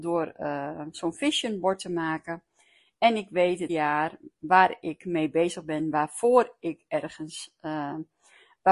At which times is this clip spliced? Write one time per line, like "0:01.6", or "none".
0:03.7